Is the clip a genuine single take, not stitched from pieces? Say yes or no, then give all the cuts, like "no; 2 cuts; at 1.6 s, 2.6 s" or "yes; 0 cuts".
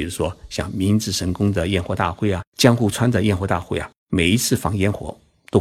no; 2 cuts; at 2.5 s, 4.0 s